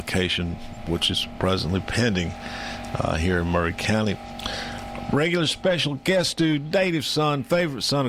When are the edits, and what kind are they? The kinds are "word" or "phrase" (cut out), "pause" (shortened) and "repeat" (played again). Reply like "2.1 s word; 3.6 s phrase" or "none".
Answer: none